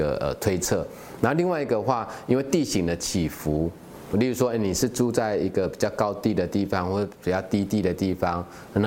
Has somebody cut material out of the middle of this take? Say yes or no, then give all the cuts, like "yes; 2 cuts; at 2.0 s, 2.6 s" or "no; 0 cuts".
yes; 1 cut; at 4.1 s